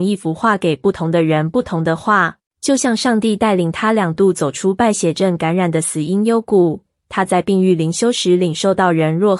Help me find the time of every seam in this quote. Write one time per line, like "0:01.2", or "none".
0:02.5